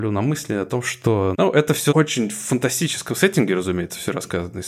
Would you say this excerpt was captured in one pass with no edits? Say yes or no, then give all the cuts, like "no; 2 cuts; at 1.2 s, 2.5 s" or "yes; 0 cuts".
yes; 0 cuts